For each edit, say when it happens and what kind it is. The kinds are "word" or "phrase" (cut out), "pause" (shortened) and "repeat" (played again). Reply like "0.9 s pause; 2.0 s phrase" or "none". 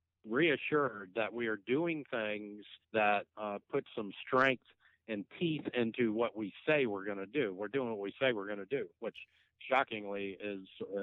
2.8 s pause